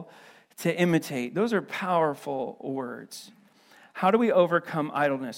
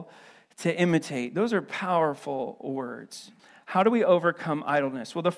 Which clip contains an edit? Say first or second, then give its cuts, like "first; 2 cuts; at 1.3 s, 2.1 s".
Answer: second; 1 cut; at 3.4 s